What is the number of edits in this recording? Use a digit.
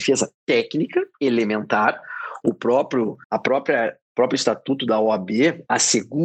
3